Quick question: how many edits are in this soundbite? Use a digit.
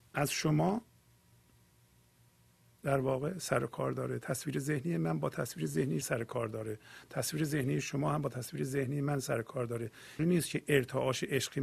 2